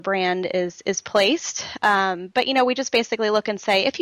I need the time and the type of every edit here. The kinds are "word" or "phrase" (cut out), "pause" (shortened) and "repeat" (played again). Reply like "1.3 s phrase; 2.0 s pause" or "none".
none